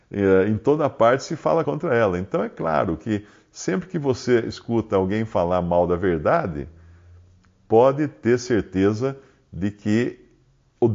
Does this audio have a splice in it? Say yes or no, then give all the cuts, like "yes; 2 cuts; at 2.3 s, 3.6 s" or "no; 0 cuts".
yes; 1 cut; at 1.6 s